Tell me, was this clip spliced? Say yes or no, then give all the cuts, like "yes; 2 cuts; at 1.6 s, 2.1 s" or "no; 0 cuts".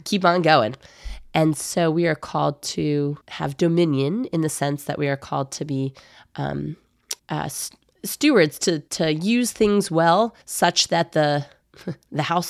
yes; 4 cuts; at 3.2 s, 7.2 s, 8.9 s, 10.4 s